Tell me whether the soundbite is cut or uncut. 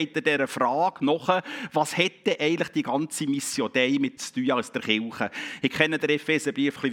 cut